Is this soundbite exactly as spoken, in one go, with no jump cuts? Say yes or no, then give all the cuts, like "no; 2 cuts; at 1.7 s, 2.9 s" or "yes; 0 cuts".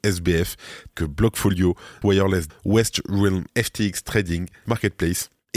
no; 5 cuts; at 0.9 s, 2.0 s, 2.5 s, 3.5 s, 4.7 s